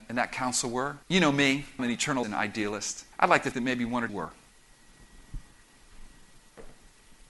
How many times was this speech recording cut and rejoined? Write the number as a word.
six